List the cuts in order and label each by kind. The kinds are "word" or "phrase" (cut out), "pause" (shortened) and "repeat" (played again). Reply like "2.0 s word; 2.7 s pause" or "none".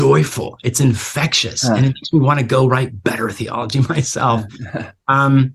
none